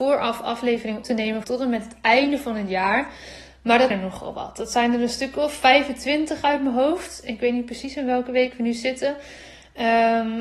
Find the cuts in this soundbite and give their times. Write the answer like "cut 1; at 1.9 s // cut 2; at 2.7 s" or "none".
cut 1; at 1.0 s // cut 2; at 1.4 s // cut 3; at 3.9 s